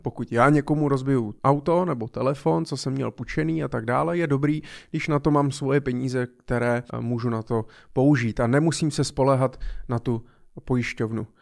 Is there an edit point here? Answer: yes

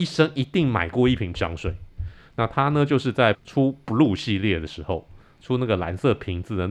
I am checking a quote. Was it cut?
yes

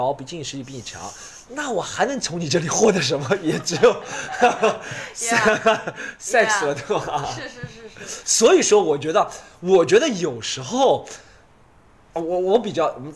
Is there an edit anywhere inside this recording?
no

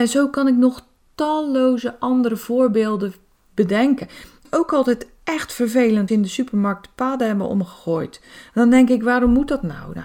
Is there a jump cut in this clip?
yes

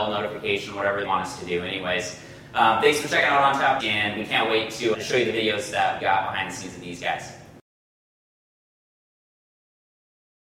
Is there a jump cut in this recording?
yes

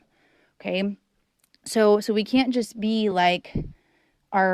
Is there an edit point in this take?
no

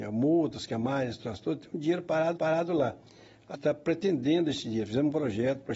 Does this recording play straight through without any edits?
no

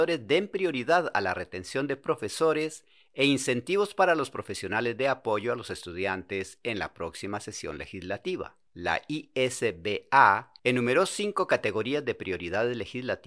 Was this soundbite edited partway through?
yes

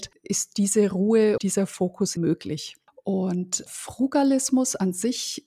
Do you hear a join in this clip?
yes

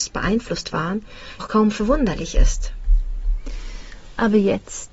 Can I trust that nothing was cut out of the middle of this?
no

